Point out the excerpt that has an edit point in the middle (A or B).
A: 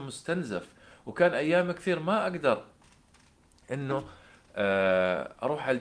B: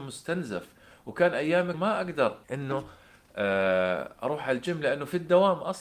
B